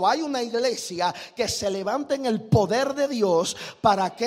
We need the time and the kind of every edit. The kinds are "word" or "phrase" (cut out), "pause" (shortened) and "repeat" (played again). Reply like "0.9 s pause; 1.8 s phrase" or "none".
none